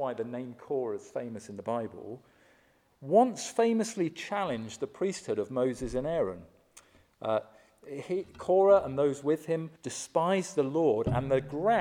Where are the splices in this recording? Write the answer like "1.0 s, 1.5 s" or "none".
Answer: 9.8 s